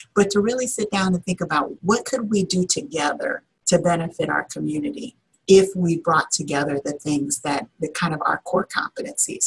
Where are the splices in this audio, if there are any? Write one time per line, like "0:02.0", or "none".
none